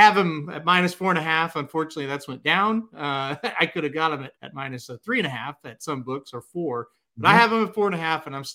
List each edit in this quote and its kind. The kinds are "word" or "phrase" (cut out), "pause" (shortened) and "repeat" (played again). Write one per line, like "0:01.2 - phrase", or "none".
0:04.4 - pause